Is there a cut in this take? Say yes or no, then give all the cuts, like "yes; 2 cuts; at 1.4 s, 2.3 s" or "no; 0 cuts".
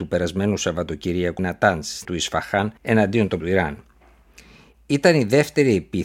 yes; 4 cuts; at 1.4 s, 2.0 s, 2.8 s, 3.4 s